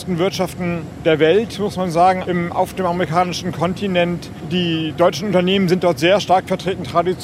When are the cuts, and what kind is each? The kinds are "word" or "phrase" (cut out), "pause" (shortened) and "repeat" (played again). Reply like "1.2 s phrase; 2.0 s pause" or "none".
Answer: 2.2 s phrase